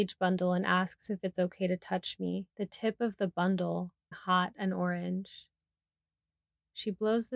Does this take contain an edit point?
yes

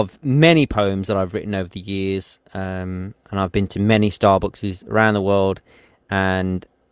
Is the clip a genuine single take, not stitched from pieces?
yes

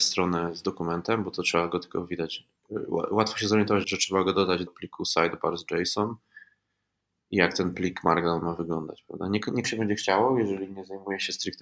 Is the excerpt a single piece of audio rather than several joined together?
no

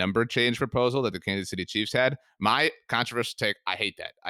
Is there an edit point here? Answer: no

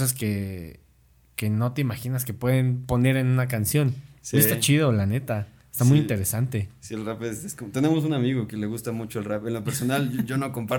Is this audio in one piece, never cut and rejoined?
yes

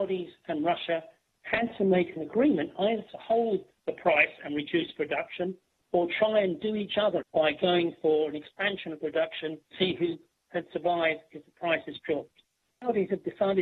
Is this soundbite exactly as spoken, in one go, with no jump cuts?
no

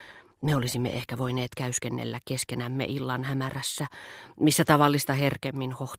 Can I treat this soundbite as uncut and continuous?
yes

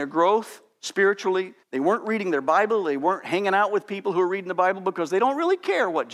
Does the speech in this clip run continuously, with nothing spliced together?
no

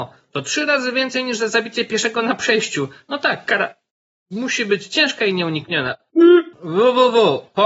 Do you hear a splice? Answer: no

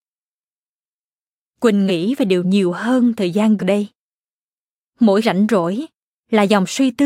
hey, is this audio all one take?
no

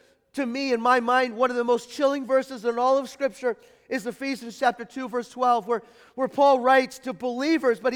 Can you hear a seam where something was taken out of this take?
no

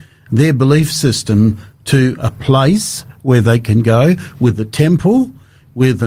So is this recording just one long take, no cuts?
yes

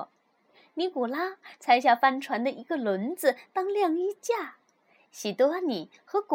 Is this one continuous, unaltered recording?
yes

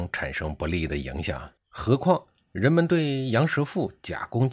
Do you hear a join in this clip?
yes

